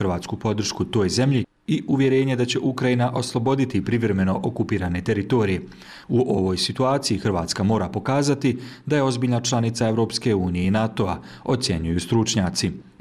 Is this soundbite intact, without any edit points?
yes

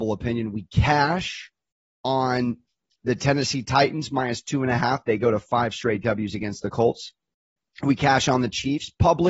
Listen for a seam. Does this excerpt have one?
no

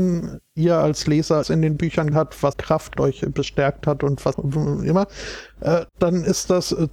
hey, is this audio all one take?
no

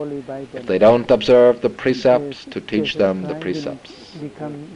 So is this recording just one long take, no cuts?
yes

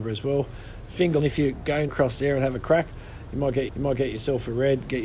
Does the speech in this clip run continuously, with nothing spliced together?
no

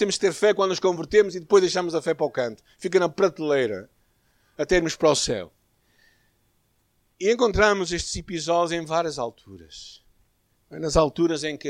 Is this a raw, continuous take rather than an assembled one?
yes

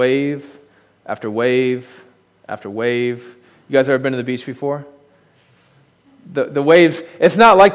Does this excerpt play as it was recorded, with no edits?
yes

